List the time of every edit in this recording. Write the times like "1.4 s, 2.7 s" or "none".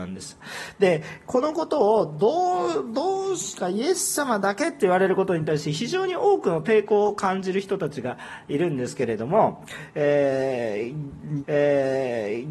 11.4 s